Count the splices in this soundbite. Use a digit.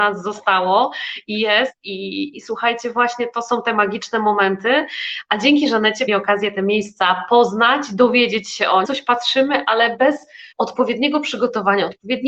4